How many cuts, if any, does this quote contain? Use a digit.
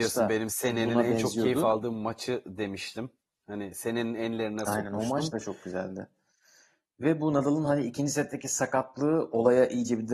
0